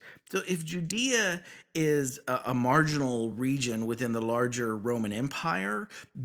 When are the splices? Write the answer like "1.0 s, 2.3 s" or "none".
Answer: none